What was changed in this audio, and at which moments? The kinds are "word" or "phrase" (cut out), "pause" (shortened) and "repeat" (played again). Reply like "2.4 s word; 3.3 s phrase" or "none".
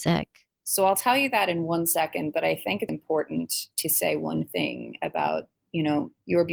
2.9 s word